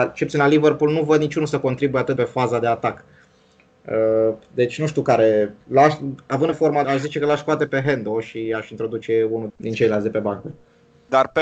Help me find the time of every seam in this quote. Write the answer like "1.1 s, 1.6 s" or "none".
2.2 s, 5.6 s, 6.5 s, 6.8 s, 7.7 s, 9.5 s